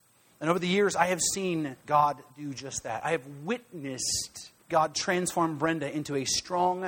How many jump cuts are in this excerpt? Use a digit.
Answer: 2